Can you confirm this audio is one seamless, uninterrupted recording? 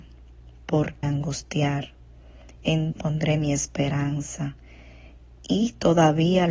no; 2 cuts; at 1.0 s, 2.9 s

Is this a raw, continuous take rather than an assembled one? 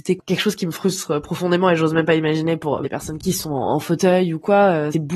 yes; 0 cuts

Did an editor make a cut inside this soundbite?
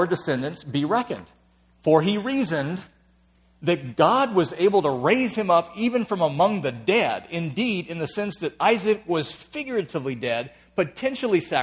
no; 0 cuts

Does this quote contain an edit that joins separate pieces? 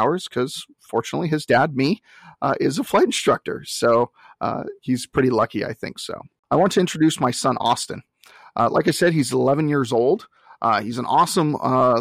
no; 0 cuts

